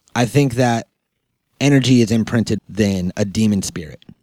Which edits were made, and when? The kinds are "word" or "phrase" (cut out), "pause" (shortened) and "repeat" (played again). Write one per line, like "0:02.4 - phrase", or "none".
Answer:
0:02.6 - word